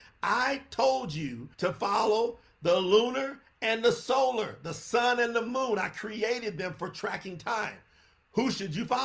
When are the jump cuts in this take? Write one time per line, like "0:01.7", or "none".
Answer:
0:01.5